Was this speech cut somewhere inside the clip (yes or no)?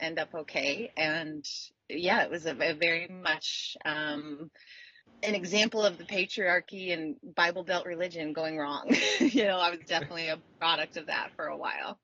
yes